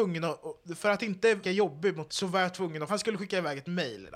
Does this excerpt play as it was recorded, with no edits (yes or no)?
no